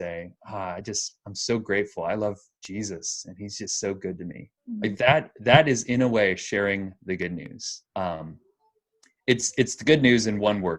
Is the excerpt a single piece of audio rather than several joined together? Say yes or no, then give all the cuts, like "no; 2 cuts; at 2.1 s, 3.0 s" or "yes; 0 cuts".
no; 2 cuts; at 4.6 s, 7.9 s